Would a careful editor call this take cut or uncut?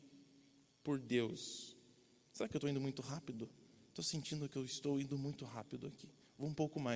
uncut